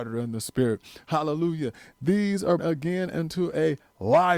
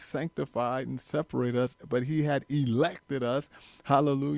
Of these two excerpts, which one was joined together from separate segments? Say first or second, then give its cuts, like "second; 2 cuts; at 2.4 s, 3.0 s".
first; 1 cut; at 2.6 s